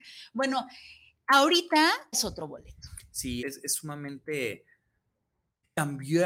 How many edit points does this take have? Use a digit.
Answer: 2